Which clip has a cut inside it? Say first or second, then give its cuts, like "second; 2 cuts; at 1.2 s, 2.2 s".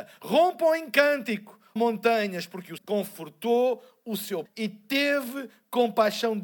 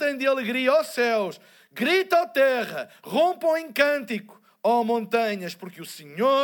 first; 3 cuts; at 1.8 s, 2.8 s, 4.5 s